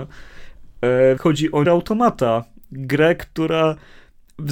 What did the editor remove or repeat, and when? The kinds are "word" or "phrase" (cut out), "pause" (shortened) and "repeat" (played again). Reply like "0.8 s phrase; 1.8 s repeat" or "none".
1.2 s word; 1.6 s word